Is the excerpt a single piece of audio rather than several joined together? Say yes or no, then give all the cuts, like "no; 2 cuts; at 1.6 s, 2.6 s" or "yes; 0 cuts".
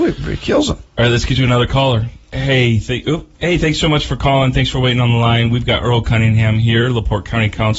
no; 2 cuts; at 2.2 s, 3.3 s